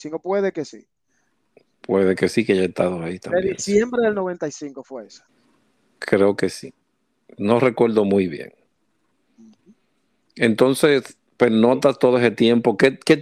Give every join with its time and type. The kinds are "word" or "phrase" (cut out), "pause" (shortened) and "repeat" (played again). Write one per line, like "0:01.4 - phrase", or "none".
none

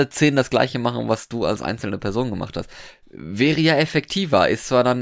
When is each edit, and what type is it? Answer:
none

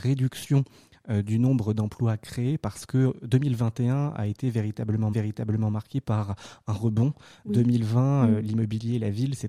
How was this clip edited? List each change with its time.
0:05.1 - repeat

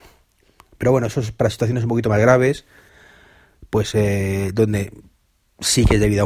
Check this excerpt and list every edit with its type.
none

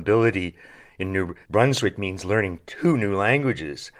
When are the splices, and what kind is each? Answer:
0:01.4 - pause

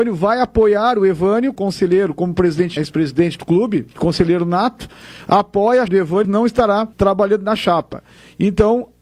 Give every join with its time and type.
0:01.6 - word
0:02.8 - word
0:03.9 - pause
0:05.9 - word
0:06.2 - word
0:06.9 - pause

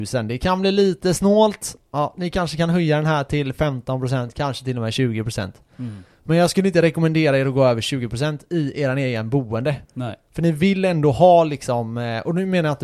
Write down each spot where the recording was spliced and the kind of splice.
0:09.8 - pause

